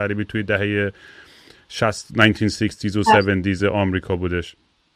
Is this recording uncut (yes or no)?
yes